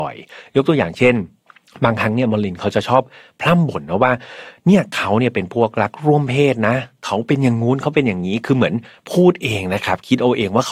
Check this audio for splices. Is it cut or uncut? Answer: uncut